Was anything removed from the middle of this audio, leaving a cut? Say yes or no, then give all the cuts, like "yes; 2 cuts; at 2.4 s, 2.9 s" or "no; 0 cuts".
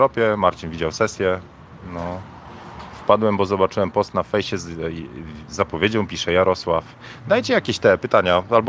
no; 0 cuts